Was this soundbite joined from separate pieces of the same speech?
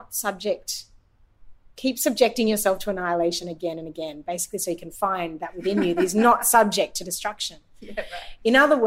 no; 0 cuts

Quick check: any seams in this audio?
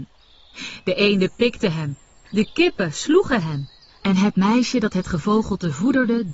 no; 0 cuts

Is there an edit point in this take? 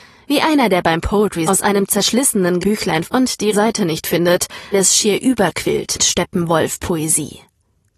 yes; 6 cuts; at 1.5 s, 2.6 s, 3.0 s, 3.5 s, 4.7 s, 6.0 s

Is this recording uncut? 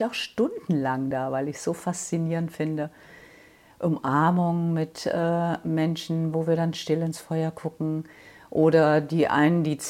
yes; 0 cuts

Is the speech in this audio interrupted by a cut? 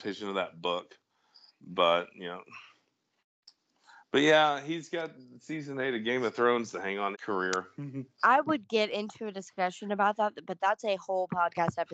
yes; 2 cuts; at 7.1 s, 8.2 s

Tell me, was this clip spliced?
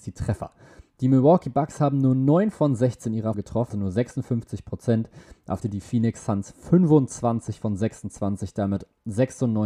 yes; 3 cuts; at 3.3 s, 3.7 s, 5.6 s

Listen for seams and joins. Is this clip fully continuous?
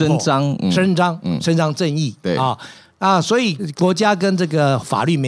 yes; 0 cuts

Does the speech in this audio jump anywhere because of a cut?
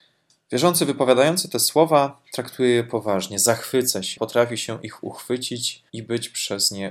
yes; 2 cuts; at 4.2 s, 5.9 s

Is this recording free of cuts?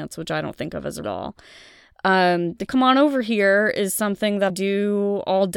no; 3 cuts; at 1.0 s, 2.7 s, 4.5 s

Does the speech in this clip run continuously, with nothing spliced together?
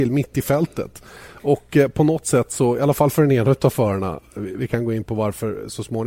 yes; 0 cuts

